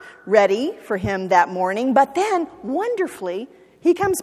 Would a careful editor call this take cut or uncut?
uncut